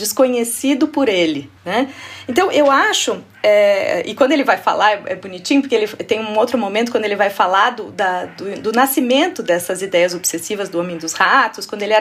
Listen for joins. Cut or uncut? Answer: cut